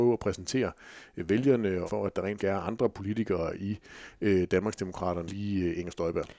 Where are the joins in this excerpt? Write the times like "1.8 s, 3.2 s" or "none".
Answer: 1.9 s, 2.4 s, 5.3 s